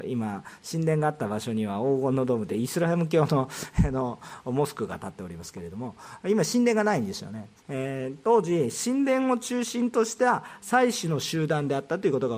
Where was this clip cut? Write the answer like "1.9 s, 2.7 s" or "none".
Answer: 7.6 s